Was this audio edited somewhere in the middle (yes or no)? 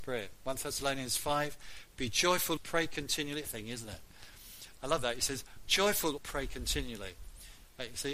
yes